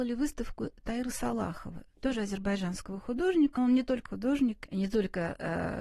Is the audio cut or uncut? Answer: cut